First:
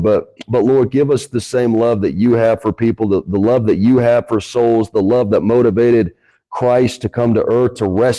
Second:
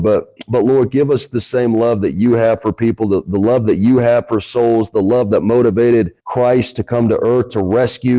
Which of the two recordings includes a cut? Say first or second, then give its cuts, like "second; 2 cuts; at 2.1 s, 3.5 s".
second; 1 cut; at 6.2 s